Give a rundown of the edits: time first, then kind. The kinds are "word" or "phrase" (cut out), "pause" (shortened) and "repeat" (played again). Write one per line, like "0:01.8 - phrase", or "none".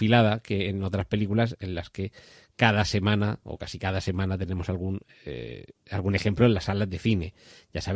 none